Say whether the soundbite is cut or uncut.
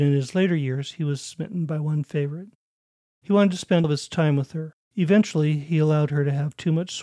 cut